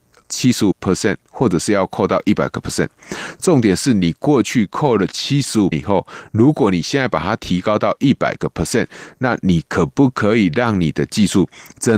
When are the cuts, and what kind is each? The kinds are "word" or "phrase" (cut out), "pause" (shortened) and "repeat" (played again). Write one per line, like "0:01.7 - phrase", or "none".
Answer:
0:05.7 - word